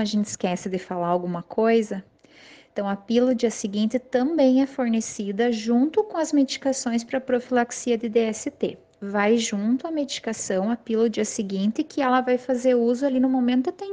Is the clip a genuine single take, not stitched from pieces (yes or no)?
yes